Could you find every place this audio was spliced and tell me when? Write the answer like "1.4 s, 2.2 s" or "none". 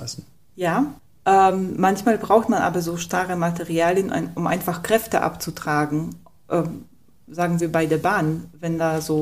none